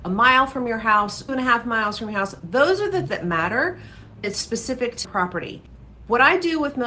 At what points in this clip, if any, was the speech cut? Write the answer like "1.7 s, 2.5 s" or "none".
1.3 s, 3.1 s, 4.2 s, 5.0 s